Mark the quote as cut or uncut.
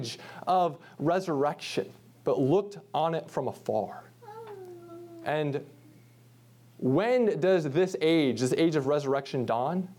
uncut